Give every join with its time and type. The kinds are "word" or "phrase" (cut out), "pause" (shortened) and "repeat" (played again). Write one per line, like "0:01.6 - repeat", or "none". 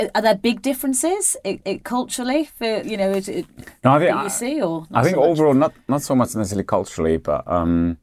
0:01.6 - repeat
0:02.8 - word